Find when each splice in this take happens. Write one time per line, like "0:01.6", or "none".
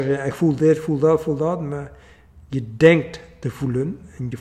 none